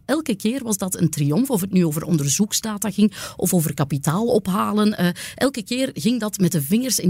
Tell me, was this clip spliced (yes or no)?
no